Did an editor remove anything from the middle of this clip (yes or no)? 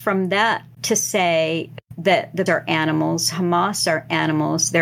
yes